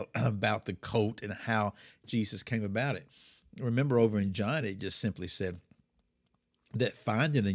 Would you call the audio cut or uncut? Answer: uncut